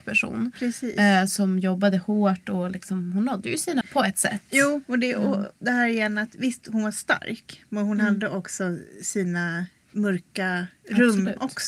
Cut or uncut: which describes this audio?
cut